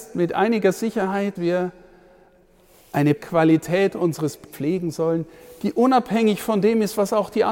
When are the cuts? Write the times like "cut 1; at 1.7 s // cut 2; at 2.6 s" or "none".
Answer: cut 1; at 1.4 s // cut 2; at 3.2 s // cut 3; at 4.5 s